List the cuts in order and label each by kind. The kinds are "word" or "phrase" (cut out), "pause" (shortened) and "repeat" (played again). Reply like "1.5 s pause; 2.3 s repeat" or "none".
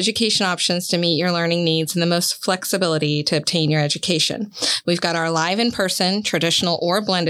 none